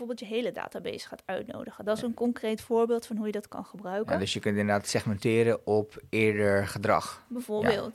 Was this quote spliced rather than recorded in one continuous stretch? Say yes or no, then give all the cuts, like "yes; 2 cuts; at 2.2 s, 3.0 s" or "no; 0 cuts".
no; 0 cuts